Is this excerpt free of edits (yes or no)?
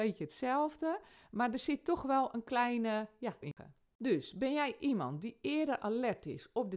no